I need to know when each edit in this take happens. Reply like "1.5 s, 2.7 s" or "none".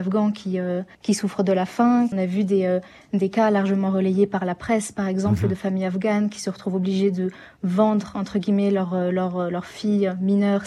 none